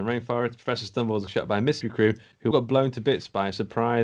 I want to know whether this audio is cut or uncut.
cut